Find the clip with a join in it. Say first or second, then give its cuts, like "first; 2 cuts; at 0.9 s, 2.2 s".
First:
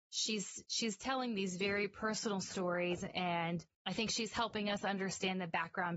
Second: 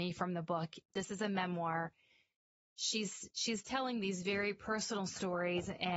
first; 1 cut; at 3.7 s